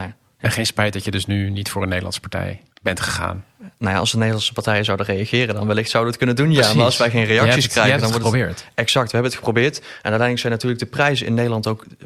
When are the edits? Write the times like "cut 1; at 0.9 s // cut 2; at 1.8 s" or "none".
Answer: cut 1; at 2.7 s